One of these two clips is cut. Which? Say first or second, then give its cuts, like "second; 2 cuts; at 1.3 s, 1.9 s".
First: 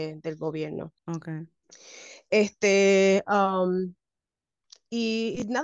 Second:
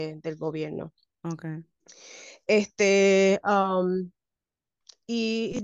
first; 1 cut; at 1.0 s